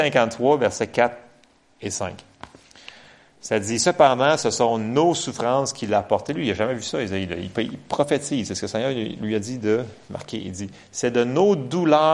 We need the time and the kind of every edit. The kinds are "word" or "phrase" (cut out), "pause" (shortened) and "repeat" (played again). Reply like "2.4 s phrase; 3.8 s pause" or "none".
none